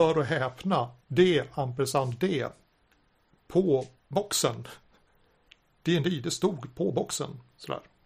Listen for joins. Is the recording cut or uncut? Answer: cut